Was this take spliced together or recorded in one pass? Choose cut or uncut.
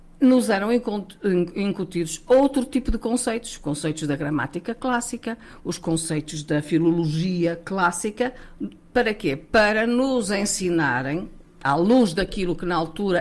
uncut